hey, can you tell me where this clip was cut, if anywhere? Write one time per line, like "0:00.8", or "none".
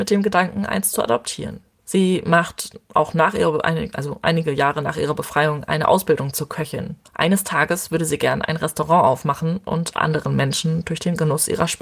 0:07.0